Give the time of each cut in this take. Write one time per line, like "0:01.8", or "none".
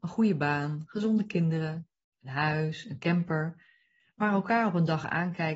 none